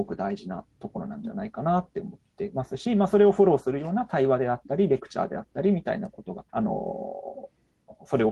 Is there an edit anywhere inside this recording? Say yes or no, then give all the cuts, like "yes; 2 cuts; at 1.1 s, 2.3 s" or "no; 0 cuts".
yes; 1 cut; at 6.5 s